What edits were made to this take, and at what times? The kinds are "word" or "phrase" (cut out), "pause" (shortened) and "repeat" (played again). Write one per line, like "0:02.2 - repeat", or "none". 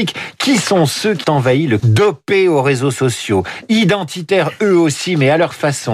0:01.2 - word
0:01.8 - word